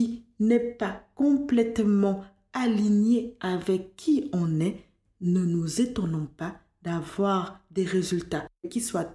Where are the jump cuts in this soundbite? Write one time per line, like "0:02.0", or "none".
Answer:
none